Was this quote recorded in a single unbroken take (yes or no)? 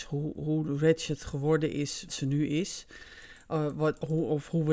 no